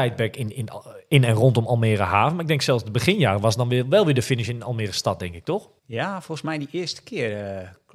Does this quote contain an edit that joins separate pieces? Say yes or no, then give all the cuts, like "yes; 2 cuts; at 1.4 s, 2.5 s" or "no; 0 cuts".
yes; 1 cut; at 5.8 s